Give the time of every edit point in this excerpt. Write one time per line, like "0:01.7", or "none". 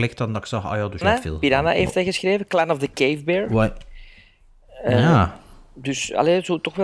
0:01.0